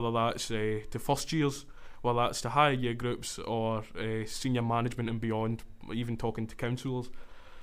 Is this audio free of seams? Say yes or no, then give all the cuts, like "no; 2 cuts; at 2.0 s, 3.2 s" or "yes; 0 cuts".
yes; 0 cuts